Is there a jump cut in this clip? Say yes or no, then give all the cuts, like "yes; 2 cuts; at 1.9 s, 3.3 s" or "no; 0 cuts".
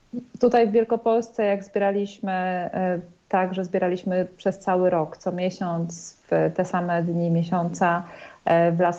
no; 0 cuts